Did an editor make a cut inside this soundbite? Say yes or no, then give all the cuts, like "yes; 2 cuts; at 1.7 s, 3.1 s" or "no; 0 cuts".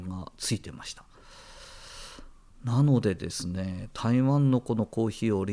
no; 0 cuts